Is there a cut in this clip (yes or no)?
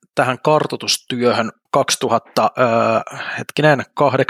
yes